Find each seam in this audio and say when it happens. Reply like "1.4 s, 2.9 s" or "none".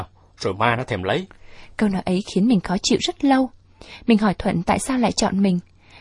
none